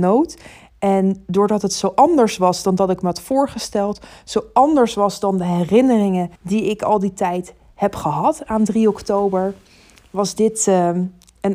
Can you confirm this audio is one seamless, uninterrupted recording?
no; 1 cut; at 6.4 s

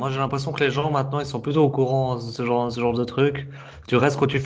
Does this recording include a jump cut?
no; 0 cuts

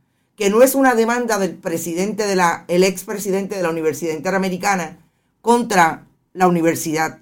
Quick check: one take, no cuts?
yes; 0 cuts

